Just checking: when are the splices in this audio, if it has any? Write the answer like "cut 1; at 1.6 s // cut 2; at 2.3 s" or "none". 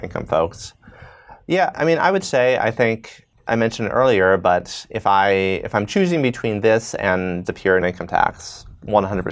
cut 1; at 1.7 s // cut 2; at 7.4 s // cut 3; at 7.8 s